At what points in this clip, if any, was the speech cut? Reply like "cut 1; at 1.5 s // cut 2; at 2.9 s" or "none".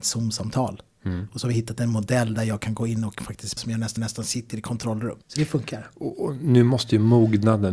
cut 1; at 3.6 s // cut 2; at 4.0 s // cut 3; at 5.2 s